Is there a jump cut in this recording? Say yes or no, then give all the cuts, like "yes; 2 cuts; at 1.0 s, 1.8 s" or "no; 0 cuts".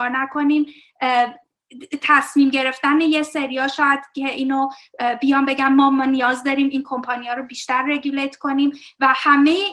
no; 0 cuts